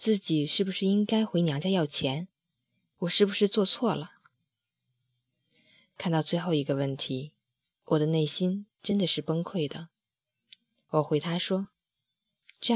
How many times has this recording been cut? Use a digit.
0